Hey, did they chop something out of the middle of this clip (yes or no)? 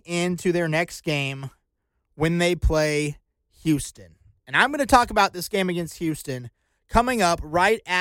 no